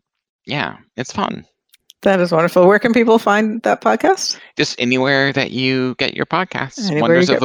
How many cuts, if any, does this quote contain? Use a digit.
0